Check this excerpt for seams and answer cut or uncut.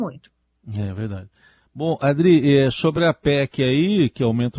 uncut